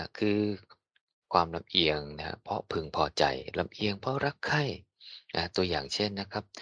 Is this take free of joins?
yes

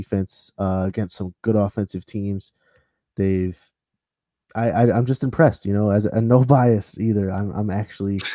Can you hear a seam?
no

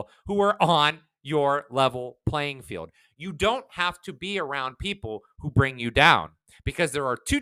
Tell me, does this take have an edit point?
no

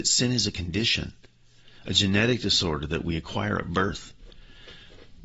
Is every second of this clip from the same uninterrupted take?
yes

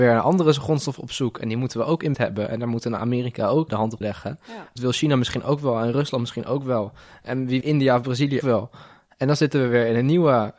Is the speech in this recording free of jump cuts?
no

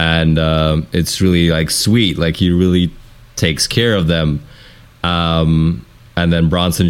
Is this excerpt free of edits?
yes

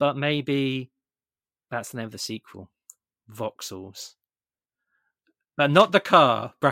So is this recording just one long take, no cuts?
yes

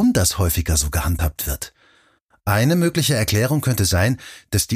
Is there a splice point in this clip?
no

